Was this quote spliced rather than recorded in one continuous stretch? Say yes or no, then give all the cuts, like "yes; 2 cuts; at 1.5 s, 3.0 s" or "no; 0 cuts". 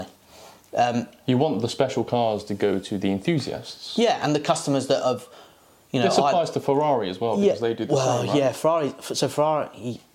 no; 0 cuts